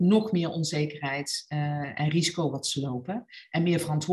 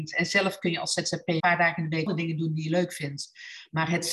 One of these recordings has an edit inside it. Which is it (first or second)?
second